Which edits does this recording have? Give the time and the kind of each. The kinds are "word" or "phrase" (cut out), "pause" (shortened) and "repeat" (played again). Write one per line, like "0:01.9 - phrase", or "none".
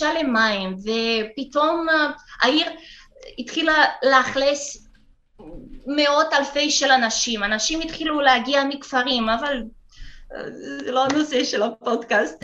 none